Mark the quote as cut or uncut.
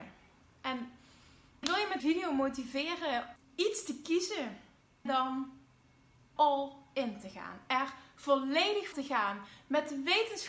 cut